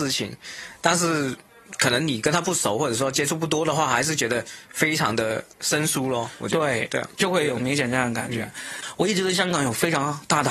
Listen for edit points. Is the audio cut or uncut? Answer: cut